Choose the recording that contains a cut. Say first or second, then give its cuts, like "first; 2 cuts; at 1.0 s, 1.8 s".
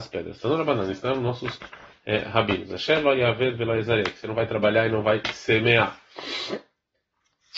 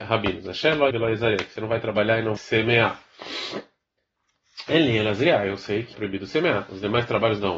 second; 3 cuts; at 0.9 s, 2.4 s, 5.9 s